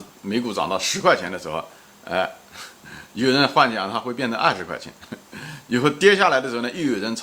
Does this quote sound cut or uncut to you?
cut